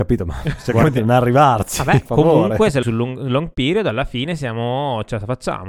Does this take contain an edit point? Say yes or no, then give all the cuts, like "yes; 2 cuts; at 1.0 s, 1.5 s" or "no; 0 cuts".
yes; 2 cuts; at 2.1 s, 2.8 s